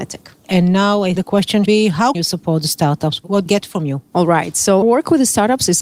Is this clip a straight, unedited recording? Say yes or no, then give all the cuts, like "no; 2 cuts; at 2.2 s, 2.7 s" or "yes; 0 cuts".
no; 5 cuts; at 1.2 s, 1.7 s, 2.1 s, 3.5 s, 4.8 s